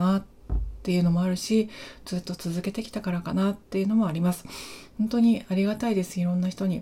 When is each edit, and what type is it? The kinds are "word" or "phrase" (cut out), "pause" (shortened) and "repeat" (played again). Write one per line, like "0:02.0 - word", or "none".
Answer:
0:03.6 - pause